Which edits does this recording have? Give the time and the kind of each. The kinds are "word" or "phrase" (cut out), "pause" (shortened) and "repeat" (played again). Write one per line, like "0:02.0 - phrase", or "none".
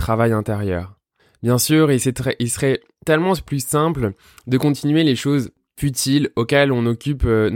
none